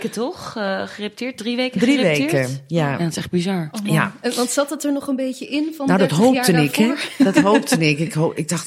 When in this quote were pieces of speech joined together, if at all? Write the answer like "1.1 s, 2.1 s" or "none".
none